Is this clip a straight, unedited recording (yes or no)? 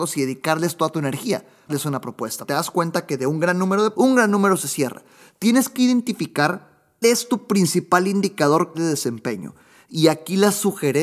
no